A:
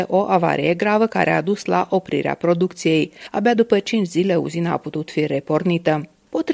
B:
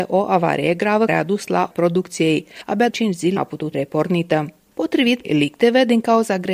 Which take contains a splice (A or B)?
B